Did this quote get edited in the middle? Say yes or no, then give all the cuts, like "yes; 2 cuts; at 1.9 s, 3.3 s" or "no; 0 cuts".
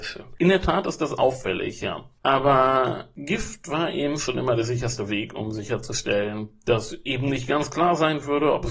no; 0 cuts